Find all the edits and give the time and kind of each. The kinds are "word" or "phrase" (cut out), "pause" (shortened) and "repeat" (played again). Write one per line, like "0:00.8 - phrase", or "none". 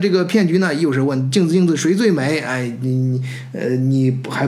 none